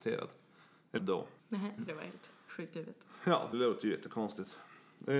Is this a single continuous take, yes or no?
no